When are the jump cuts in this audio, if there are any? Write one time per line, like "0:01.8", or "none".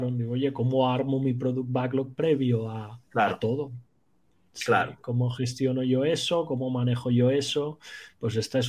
0:03.0